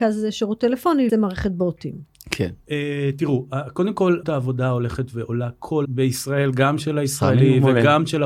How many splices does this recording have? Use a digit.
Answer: 3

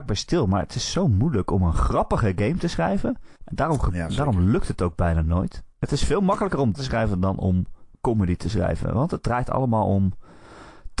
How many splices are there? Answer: 4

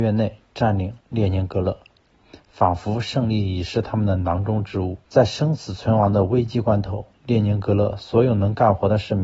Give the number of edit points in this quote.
3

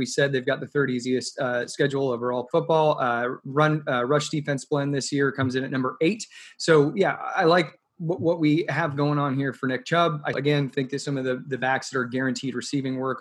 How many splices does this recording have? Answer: 2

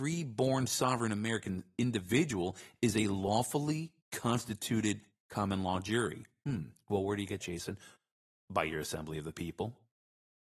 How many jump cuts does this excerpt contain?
2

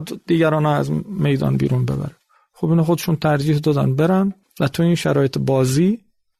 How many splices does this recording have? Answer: 0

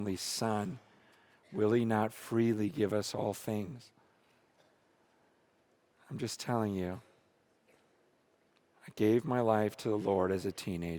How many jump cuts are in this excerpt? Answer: 0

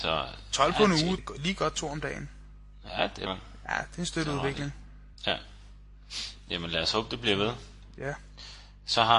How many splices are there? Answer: 3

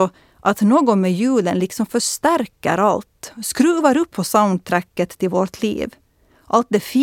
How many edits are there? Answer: 1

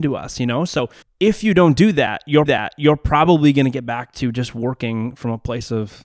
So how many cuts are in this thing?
2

